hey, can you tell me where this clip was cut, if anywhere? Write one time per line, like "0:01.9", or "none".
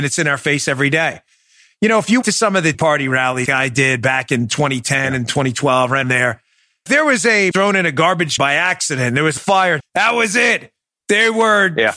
0:02.2
0:02.7
0:03.5
0:06.0
0:06.9
0:07.5
0:08.4
0:09.4
0:09.8